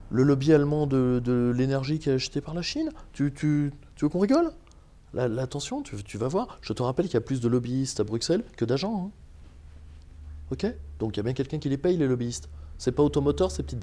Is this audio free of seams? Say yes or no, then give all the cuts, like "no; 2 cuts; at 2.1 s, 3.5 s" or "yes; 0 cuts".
yes; 0 cuts